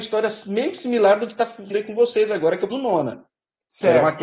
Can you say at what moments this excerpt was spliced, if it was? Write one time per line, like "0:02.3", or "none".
0:01.7
0:02.7